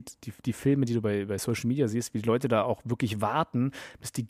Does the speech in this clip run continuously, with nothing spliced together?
yes; 0 cuts

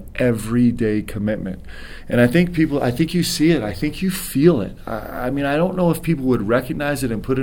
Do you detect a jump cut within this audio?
no; 0 cuts

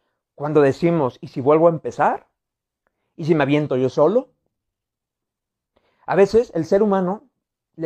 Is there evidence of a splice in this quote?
no; 0 cuts

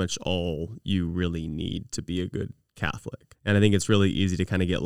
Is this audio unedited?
no; 1 cut; at 3.3 s

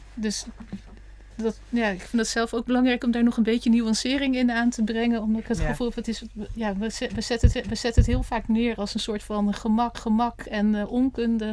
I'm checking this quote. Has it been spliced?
yes; 2 cuts; at 7.5 s, 9.9 s

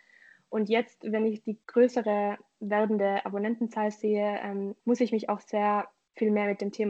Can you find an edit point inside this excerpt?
yes; 2 cuts; at 1.6 s, 4.8 s

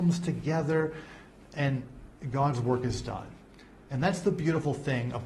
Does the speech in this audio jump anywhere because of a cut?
no; 0 cuts

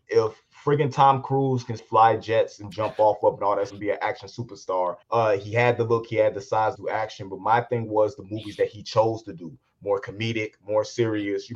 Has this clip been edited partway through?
yes; 4 cuts; at 1.8 s, 3.7 s, 5.0 s, 6.8 s

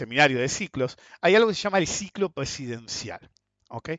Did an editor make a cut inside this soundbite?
no; 0 cuts

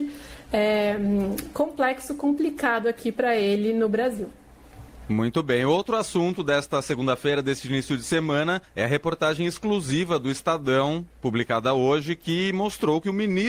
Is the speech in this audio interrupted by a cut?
yes; 1 cut; at 8.6 s

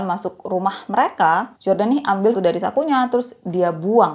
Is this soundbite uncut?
no; 2 cuts; at 1.6 s, 2.3 s

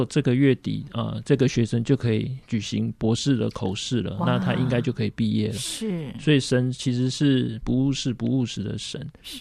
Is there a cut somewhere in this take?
no; 0 cuts

